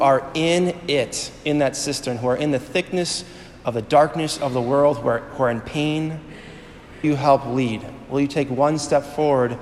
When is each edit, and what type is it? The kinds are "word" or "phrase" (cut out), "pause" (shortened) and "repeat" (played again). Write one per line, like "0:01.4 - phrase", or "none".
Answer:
0:07.0 - word